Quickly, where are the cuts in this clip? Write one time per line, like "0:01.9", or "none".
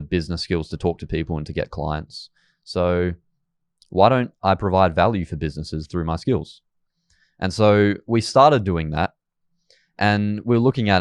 none